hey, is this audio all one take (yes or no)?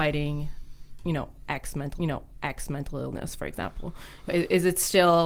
no